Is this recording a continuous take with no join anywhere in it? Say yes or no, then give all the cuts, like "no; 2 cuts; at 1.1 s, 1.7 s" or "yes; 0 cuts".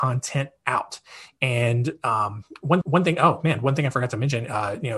no; 1 cut; at 2.8 s